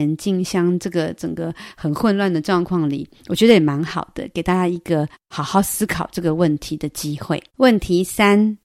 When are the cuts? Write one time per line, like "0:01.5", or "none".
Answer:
0:03.2
0:05.1
0:07.5